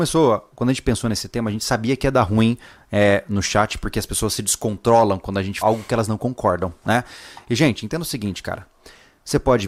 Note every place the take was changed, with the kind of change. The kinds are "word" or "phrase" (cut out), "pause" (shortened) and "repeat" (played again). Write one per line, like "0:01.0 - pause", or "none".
0:05.6 - word